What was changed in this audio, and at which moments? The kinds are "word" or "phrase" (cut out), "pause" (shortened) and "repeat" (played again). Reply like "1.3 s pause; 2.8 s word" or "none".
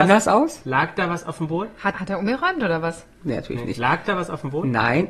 1.9 s word

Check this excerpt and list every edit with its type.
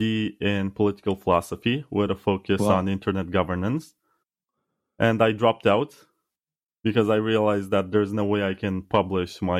none

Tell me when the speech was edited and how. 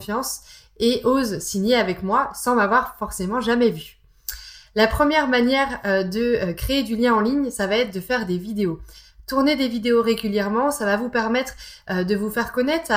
none

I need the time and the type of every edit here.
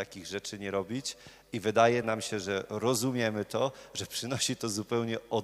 none

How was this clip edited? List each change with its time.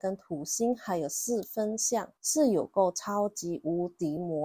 2.2 s pause

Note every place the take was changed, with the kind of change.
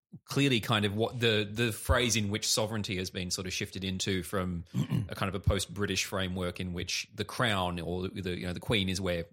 none

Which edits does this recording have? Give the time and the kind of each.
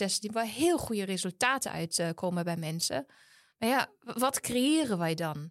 none

